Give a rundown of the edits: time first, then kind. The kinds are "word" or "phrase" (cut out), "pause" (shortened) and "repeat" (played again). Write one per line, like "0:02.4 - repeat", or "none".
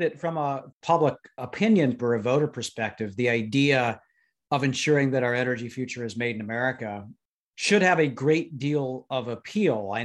0:02.0 - word

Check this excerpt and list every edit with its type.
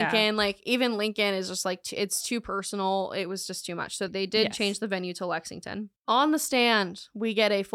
0:04.1 - word
0:06.0 - pause

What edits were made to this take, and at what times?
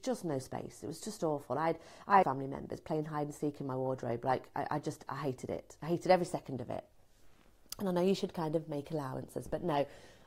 0:02.2 - phrase

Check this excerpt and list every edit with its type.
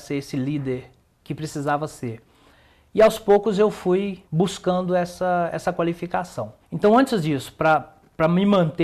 0:01.0 - word
0:04.2 - pause
0:06.6 - pause

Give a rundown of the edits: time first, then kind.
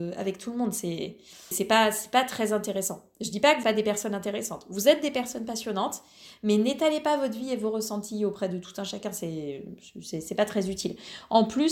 0:01.5 - word
0:03.6 - word

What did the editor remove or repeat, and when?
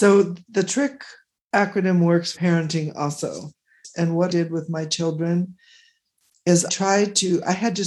0:02.3 - word
0:04.3 - word
0:06.7 - word

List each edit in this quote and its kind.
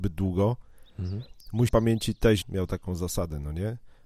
0:01.7 - word
0:02.4 - word

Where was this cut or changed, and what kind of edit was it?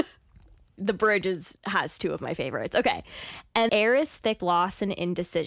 0:03.7 - word
0:04.4 - word

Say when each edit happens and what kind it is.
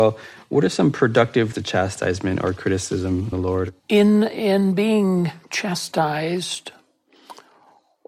0:01.5 - word
0:03.3 - word
0:03.8 - pause

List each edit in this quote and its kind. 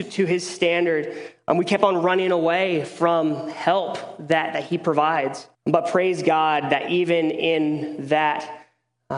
0:05.5 - pause

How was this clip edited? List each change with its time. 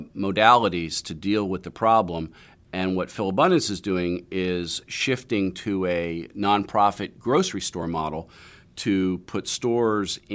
none

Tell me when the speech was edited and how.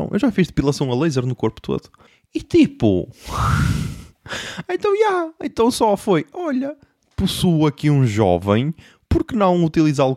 none

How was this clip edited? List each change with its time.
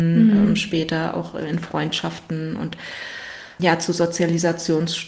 0:03.6 - word

